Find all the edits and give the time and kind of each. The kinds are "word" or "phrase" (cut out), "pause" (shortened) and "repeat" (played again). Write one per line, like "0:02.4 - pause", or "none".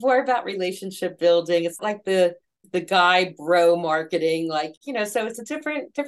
0:01.8 - word
0:02.6 - word
0:04.8 - pause